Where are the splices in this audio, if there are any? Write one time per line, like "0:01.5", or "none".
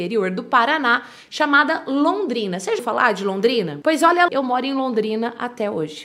0:02.8
0:04.3